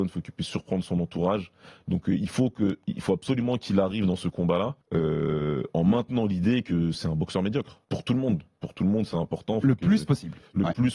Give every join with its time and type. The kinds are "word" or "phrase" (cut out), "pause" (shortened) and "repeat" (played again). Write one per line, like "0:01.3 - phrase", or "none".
0:04.8 - pause
0:07.8 - pause